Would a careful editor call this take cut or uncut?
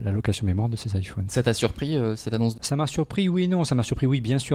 cut